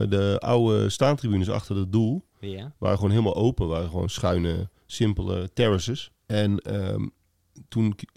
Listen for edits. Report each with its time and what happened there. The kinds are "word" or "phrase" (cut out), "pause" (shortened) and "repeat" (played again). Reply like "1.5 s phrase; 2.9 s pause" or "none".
6.2 s pause